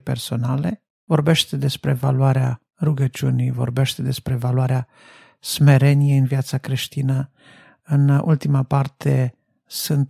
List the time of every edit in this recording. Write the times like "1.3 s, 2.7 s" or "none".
none